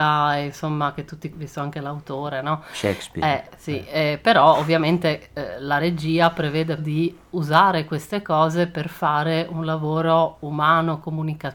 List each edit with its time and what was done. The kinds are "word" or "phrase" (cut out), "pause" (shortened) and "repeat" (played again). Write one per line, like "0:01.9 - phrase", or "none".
0:01.3 - word
0:06.8 - word